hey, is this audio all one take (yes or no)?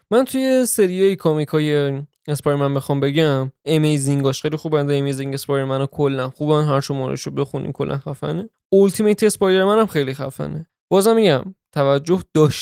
no